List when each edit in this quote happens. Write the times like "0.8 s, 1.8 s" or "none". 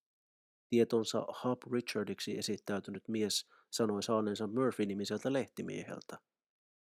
none